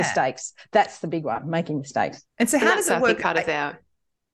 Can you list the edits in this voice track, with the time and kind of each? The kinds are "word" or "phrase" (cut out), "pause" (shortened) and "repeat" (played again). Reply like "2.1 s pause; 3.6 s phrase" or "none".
2.3 s pause